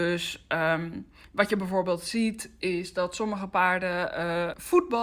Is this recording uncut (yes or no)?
yes